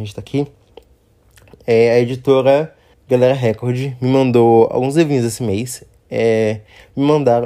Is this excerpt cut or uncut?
cut